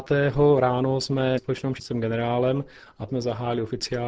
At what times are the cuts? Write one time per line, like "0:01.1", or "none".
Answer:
0:01.4
0:01.8
0:03.1